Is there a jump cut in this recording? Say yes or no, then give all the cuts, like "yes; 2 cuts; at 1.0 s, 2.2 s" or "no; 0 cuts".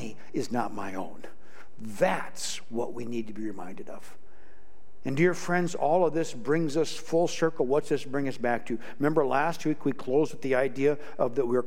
no; 0 cuts